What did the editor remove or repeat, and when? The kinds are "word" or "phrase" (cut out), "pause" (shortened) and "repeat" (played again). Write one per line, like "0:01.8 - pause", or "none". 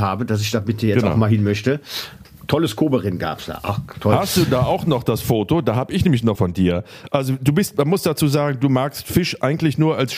0:06.3 - phrase